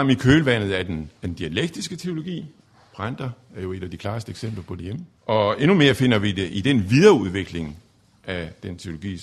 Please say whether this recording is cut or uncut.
cut